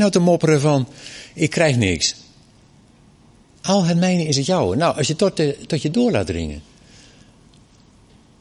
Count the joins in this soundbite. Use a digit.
0